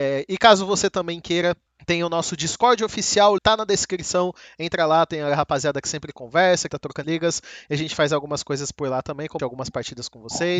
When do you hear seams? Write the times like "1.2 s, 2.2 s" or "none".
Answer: 1.7 s, 3.4 s, 6.7 s, 7.0 s, 9.4 s